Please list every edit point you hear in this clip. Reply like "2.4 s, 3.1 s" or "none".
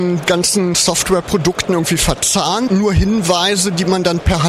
2.7 s